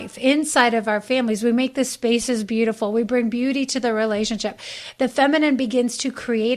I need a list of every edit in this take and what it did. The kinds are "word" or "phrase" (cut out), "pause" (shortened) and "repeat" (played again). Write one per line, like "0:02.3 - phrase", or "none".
none